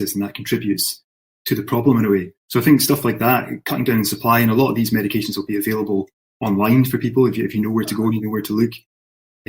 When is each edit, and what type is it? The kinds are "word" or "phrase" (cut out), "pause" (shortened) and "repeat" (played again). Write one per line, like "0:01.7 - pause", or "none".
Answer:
0:02.4 - pause